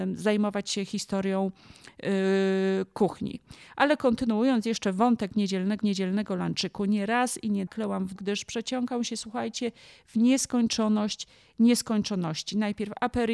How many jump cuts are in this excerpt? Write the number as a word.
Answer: three